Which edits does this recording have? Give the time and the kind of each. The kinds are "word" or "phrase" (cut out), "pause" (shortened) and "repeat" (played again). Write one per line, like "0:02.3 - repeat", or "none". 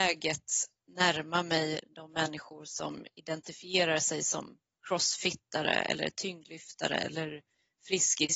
none